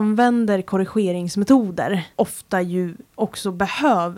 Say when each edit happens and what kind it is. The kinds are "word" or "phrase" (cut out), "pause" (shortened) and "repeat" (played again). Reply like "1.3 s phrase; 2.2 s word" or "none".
2.1 s pause; 3.1 s pause